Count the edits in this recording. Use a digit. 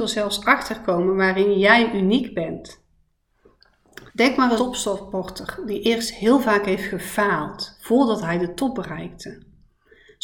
2